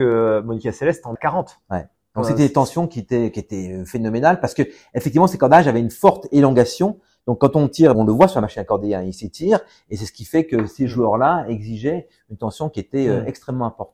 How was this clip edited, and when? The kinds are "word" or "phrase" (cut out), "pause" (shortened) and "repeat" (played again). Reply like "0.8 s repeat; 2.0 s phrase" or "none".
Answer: 1.2 s word; 7.9 s phrase